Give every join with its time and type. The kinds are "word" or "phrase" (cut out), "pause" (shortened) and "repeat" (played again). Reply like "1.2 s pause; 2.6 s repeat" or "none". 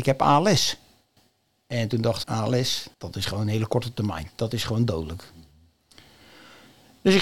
1.2 s pause; 2.2 s word; 2.9 s pause